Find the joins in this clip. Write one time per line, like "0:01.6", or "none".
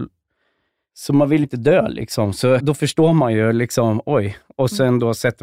0:01.4
0:02.6